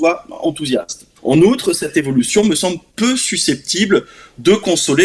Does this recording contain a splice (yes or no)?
yes